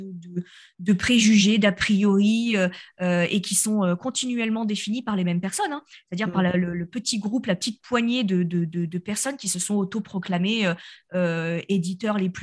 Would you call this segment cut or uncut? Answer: uncut